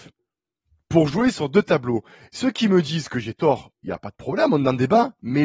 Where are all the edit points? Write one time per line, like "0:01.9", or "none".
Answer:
none